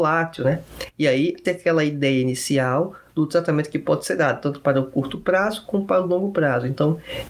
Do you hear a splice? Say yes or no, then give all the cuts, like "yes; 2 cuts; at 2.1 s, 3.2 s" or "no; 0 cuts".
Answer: yes; 1 cut; at 1.4 s